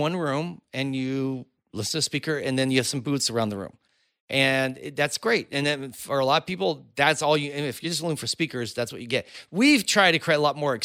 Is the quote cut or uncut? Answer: uncut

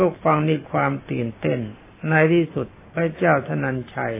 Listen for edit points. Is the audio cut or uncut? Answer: uncut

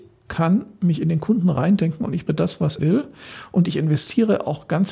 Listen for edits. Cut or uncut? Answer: cut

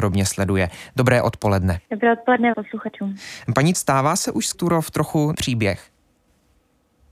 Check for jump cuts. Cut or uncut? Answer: cut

